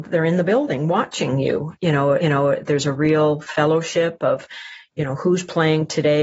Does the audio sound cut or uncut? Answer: cut